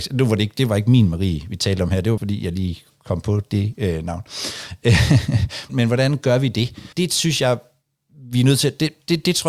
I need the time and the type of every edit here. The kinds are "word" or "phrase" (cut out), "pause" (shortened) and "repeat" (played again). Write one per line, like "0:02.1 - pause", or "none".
0:02.2 - word
0:05.7 - word
0:06.9 - pause